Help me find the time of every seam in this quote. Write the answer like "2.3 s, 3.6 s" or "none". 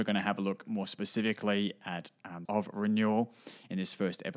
2.4 s